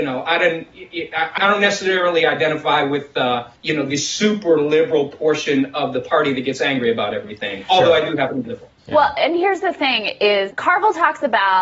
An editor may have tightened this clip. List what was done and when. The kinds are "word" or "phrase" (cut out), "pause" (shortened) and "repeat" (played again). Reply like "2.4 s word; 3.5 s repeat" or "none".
1.4 s word; 3.6 s pause; 8.4 s phrase; 8.8 s pause; 10.5 s word